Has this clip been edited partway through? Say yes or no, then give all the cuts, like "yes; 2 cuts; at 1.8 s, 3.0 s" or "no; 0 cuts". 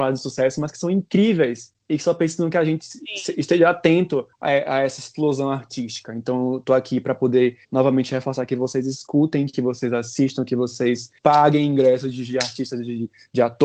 yes; 3 cuts; at 4.3 s, 7.6 s, 11.2 s